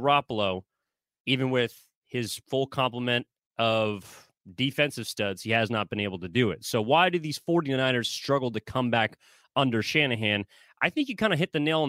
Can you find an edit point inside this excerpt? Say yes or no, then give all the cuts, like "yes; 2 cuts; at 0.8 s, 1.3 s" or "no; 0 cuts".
no; 0 cuts